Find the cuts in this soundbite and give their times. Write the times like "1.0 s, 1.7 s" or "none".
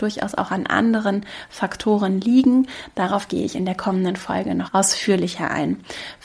4.7 s